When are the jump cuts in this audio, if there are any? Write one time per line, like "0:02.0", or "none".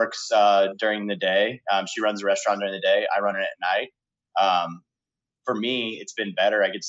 none